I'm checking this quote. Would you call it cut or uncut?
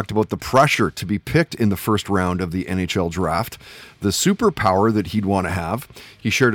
uncut